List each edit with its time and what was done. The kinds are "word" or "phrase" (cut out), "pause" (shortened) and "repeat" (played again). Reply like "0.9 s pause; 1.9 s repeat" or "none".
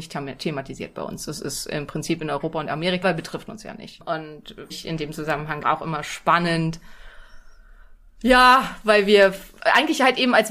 3.0 s word; 4.7 s word; 5.6 s word